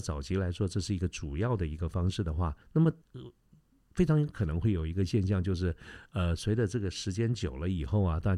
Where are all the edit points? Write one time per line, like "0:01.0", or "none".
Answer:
0:02.6
0:03.0